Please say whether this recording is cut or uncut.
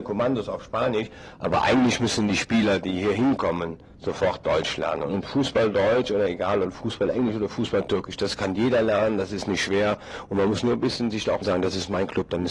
cut